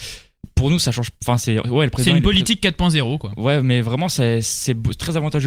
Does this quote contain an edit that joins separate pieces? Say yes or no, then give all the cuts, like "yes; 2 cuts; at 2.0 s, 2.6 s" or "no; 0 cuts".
no; 0 cuts